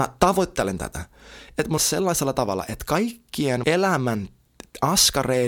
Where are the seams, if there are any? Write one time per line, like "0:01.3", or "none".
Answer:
0:01.8
0:03.6